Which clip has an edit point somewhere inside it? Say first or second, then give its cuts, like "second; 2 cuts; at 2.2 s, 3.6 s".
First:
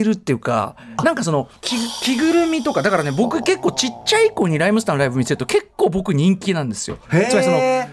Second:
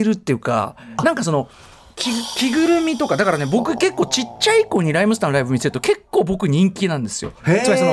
first; 1 cut; at 1.6 s